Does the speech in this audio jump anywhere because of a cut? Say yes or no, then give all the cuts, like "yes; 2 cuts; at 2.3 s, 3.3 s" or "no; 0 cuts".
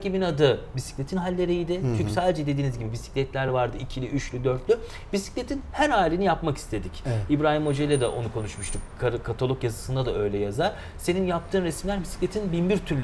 no; 0 cuts